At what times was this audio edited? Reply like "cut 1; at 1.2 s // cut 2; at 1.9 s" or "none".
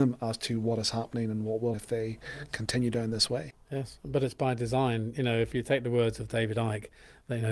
cut 1; at 1.7 s